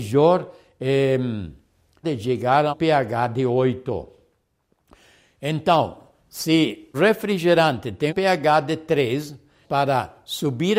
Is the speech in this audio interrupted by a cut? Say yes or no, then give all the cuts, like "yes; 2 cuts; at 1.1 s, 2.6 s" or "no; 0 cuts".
yes; 5 cuts; at 2.0 s, 2.7 s, 6.9 s, 8.1 s, 9.6 s